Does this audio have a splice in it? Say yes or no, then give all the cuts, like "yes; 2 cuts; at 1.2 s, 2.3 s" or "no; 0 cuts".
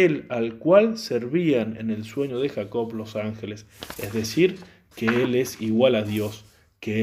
no; 0 cuts